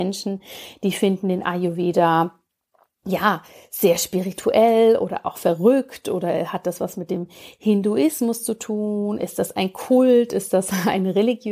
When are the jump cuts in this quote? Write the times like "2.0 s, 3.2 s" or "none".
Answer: none